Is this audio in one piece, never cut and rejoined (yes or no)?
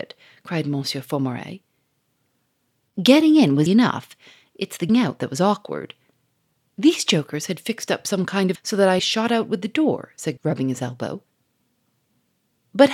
no